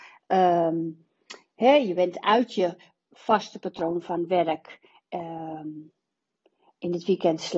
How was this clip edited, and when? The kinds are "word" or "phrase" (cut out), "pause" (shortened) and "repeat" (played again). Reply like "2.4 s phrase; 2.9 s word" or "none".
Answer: none